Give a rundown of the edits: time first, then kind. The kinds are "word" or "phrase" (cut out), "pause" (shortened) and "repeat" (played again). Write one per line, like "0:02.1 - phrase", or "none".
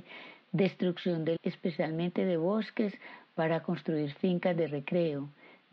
0:01.4 - word